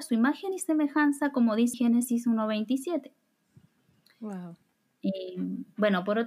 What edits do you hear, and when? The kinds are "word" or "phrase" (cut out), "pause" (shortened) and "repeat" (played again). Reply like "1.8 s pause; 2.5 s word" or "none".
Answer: 1.7 s word